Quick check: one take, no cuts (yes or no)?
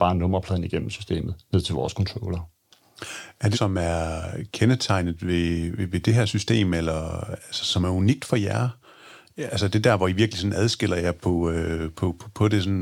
no